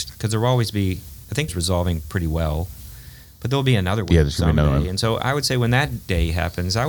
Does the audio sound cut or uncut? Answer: cut